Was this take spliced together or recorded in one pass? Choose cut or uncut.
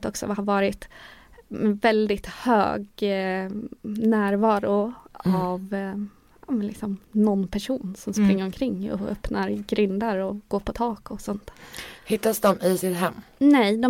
uncut